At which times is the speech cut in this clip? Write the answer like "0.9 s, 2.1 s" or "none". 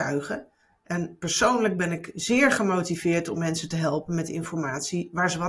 none